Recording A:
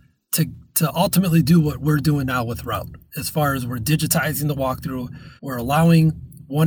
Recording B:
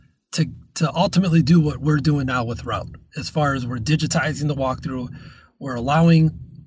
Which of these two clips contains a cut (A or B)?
A